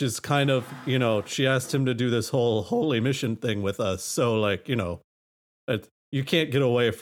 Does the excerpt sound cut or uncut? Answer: uncut